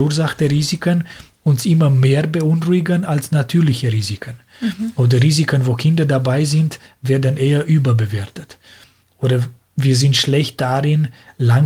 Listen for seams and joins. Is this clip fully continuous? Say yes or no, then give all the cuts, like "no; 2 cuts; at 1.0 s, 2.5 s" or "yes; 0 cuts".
yes; 0 cuts